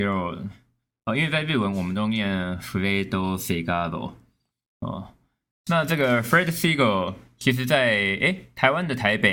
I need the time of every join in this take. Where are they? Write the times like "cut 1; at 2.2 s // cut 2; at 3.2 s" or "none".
none